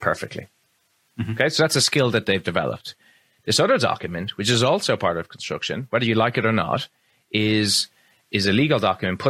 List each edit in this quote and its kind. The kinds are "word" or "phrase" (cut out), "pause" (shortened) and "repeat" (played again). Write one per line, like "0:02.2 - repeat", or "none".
none